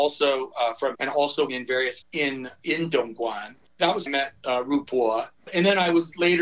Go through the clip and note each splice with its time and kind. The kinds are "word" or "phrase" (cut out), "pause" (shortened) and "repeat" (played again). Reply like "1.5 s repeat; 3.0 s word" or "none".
0.9 s phrase; 1.5 s word; 2.0 s word; 4.1 s phrase